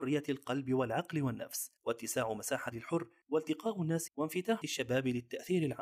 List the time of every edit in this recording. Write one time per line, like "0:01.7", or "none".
0:01.8
0:02.7
0:04.1
0:04.6